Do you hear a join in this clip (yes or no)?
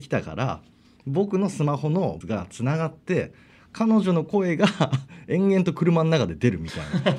yes